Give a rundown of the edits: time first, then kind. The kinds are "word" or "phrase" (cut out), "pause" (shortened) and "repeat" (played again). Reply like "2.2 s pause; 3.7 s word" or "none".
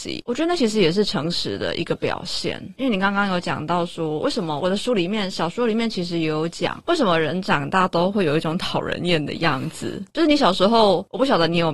10.1 s pause